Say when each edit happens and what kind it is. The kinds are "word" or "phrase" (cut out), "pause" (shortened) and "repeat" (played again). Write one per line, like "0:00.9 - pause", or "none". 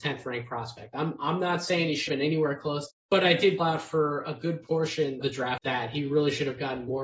0:02.1 - word
0:02.9 - phrase
0:03.6 - word
0:05.2 - word
0:05.6 - word